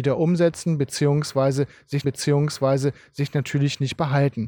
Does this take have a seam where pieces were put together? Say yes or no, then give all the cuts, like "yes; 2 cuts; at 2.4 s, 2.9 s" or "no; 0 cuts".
yes; 1 cut; at 2.0 s